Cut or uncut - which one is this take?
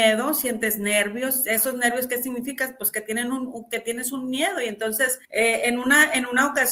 cut